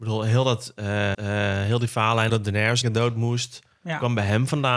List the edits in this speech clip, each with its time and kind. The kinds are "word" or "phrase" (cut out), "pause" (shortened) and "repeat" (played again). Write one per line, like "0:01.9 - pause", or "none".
0:01.1 - repeat
0:02.3 - word
0:02.8 - phrase